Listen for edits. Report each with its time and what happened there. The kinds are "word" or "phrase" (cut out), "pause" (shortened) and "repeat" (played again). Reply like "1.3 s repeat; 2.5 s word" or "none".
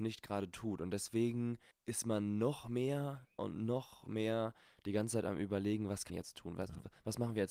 1.7 s pause; 3.4 s word; 6.1 s word